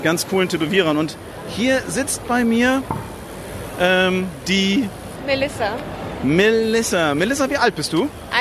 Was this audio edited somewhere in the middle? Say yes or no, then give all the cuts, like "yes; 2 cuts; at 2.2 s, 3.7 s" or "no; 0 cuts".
no; 0 cuts